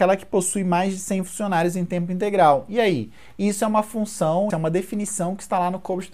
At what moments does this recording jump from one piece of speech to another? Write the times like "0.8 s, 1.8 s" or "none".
4.5 s

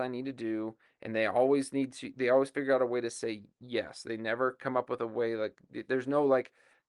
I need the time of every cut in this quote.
none

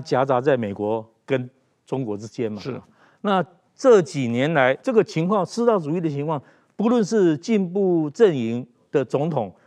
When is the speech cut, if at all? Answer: 4.8 s

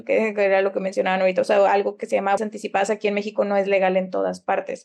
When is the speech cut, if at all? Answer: 2.4 s

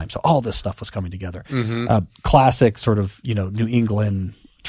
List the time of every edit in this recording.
none

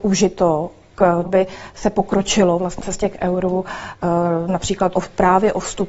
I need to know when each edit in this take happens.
1.3 s, 2.8 s, 4.9 s

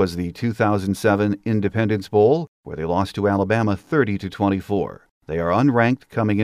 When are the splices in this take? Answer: 2.5 s, 5.2 s

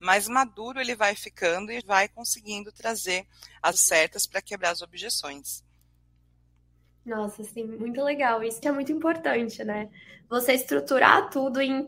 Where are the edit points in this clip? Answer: 1.8 s, 3.7 s, 8.6 s

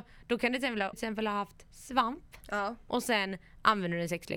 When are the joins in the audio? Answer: 0.9 s

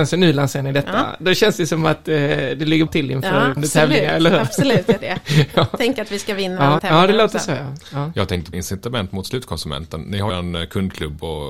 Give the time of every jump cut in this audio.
2.9 s, 3.6 s, 5.0 s, 6.8 s, 8.5 s, 10.3 s

